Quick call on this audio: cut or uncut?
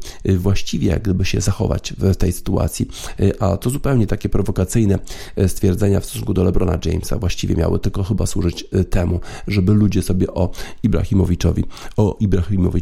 uncut